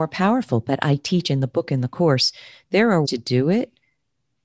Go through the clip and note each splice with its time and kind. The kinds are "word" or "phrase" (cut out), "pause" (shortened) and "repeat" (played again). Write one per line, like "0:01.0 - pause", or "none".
0:03.0 - word